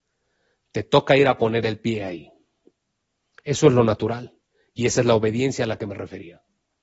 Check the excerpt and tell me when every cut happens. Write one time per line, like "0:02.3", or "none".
none